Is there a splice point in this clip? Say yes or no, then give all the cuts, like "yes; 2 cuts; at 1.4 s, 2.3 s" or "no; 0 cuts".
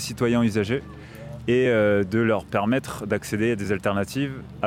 no; 0 cuts